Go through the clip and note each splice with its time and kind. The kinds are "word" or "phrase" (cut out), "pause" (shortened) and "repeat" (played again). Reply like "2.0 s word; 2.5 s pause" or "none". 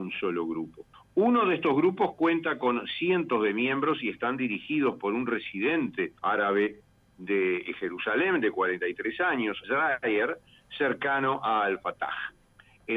0.9 s pause; 6.2 s pause; 9.6 s word